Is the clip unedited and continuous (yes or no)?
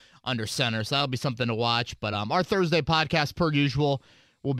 yes